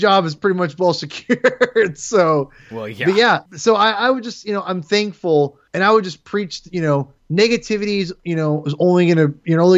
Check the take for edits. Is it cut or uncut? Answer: cut